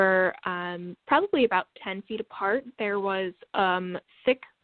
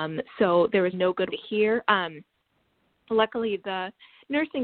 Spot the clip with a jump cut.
second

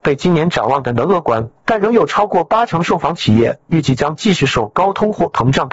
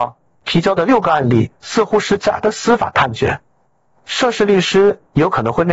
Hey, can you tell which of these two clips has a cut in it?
first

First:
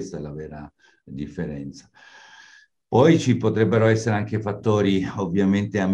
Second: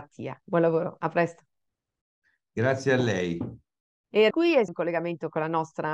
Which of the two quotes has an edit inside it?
second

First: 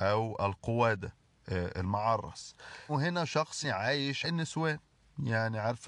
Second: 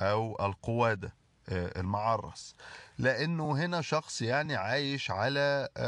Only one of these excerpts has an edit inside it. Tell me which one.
first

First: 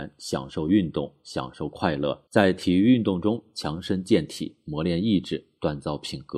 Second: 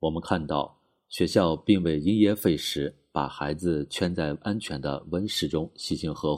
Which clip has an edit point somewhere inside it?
first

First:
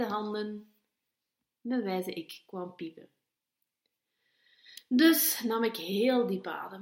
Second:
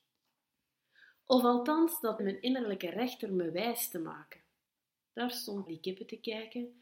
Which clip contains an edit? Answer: second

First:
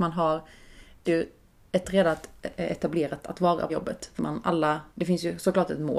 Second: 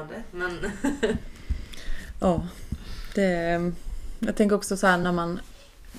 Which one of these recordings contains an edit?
first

